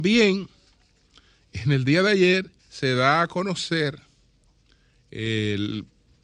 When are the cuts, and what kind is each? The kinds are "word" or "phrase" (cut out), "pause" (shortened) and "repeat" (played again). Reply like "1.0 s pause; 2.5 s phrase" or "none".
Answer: 2.6 s pause